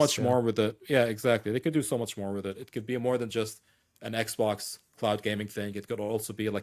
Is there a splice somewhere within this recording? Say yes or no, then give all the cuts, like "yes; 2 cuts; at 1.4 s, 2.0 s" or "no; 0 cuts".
no; 0 cuts